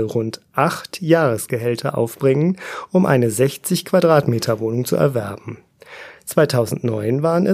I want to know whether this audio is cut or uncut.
uncut